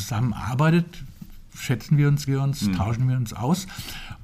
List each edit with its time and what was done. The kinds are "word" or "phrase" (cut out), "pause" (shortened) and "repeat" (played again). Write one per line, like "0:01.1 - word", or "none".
0:02.3 - word